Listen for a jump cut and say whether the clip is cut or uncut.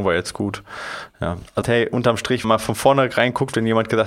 cut